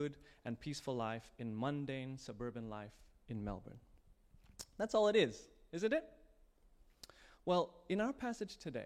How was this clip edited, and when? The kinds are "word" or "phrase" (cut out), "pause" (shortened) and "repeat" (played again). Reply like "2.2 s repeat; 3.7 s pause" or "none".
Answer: none